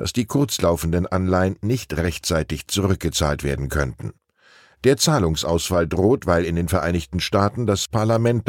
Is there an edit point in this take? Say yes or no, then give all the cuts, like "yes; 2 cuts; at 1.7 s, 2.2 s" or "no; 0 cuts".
no; 0 cuts